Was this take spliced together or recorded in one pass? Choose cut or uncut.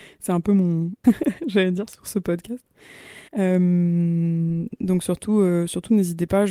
cut